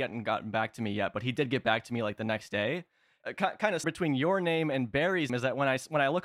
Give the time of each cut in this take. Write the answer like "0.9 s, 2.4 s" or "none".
3.8 s, 5.3 s